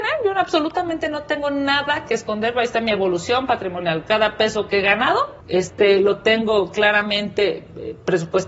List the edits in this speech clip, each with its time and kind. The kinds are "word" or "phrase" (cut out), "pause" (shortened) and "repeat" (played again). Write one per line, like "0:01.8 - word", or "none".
0:05.4 - pause